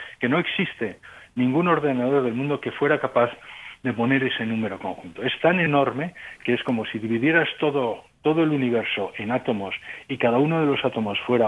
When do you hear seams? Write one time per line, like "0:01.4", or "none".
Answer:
none